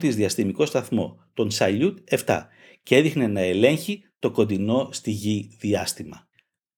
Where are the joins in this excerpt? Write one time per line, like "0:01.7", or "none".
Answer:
none